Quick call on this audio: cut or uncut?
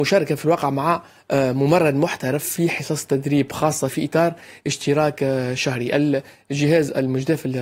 uncut